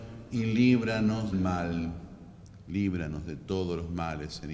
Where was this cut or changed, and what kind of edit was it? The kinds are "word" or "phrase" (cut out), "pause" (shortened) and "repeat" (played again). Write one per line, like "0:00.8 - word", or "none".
0:01.3 - word